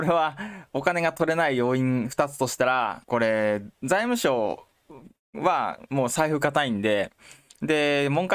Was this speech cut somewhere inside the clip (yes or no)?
yes